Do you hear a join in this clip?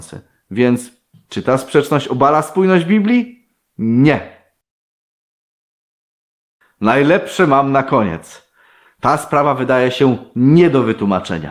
no; 0 cuts

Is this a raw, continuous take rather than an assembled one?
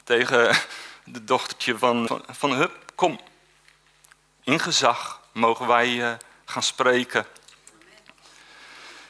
no; 1 cut; at 2.1 s

